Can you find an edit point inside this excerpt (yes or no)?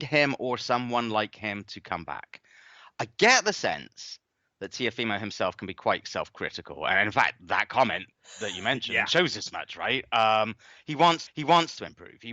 yes